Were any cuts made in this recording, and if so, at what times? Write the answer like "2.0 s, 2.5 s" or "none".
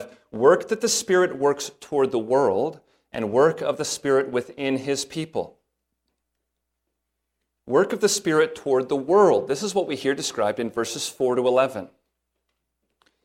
none